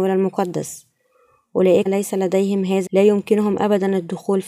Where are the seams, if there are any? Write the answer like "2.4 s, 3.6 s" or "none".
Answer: 1.9 s, 2.9 s